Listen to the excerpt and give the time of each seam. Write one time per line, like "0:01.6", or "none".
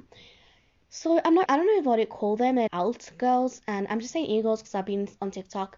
0:01.5
0:02.7